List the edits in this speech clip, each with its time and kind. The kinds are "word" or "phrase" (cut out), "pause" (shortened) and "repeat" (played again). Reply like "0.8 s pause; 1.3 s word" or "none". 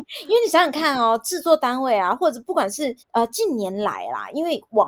3.0 s pause